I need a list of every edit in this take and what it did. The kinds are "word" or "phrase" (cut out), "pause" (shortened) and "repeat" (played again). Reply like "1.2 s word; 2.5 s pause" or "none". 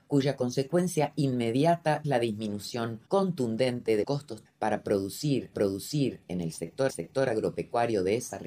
2.0 s word; 3.1 s pause; 4.0 s word; 4.4 s word; 5.5 s repeat; 6.9 s repeat